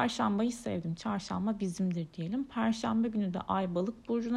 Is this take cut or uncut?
uncut